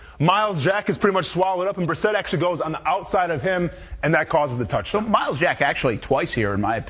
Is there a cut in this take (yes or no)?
no